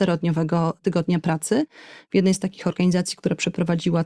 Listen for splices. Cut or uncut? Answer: uncut